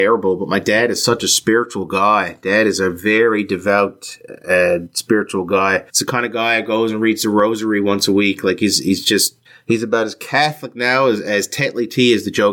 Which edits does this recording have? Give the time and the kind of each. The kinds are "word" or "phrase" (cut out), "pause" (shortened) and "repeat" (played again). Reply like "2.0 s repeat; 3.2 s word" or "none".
5.9 s pause; 9.5 s pause